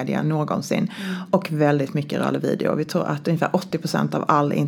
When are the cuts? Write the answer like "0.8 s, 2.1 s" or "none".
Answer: none